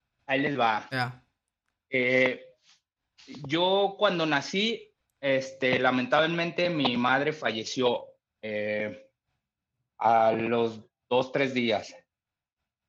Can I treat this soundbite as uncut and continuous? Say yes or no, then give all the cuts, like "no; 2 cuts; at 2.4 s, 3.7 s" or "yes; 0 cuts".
yes; 0 cuts